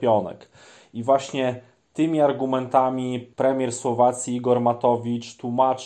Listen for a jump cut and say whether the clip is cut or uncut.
uncut